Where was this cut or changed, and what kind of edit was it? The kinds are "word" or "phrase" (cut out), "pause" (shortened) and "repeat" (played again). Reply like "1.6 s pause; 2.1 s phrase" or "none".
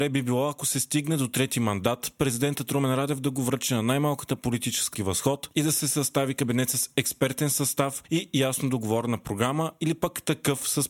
4.9 s phrase